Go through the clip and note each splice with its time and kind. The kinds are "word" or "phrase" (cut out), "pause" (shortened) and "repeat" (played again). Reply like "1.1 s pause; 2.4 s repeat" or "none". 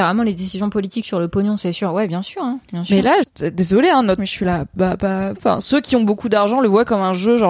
3.2 s word; 4.2 s phrase; 5.4 s word